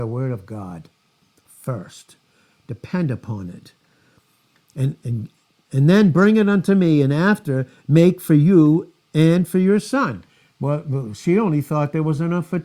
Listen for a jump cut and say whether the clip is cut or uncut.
uncut